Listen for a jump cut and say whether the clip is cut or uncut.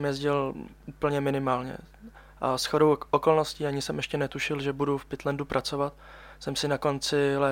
uncut